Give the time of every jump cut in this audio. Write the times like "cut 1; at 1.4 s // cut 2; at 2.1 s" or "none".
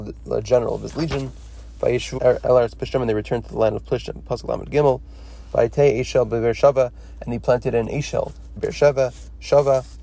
cut 1; at 2.2 s // cut 2; at 8.6 s